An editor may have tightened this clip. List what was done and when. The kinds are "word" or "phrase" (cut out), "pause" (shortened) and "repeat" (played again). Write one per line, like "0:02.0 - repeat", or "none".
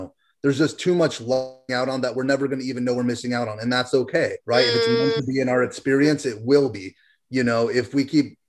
0:01.7 - phrase
0:04.4 - pause